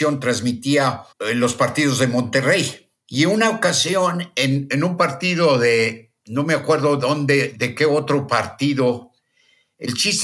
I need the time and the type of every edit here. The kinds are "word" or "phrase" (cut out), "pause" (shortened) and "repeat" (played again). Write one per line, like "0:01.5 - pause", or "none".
0:01.1 - pause
0:06.2 - pause

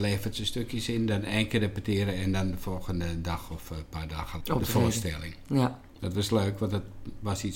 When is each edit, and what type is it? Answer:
0:04.4 - word

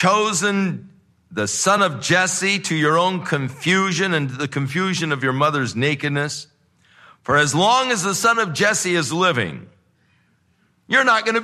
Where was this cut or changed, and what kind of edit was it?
none

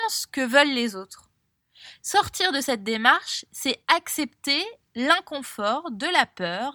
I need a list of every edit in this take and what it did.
none

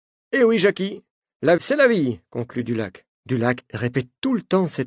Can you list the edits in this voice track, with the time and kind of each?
0:01.6 - word
0:03.1 - pause

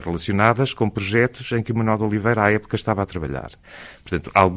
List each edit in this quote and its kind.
none

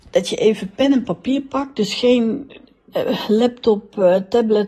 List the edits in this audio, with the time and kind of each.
none

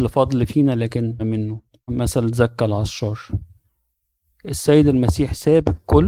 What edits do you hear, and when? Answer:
0:01.2 - word
0:01.9 - phrase

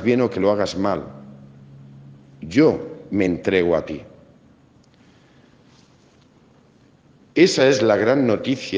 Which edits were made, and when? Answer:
none

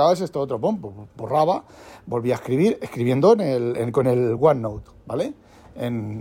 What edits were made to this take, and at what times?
none

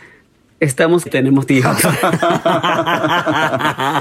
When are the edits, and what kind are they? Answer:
0:01.1 - word
0:01.5 - word

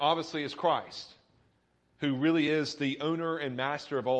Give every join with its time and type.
none

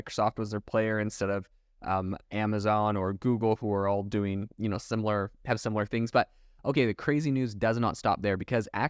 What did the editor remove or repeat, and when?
none

